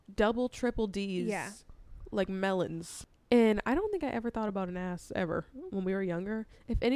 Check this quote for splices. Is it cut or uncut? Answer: uncut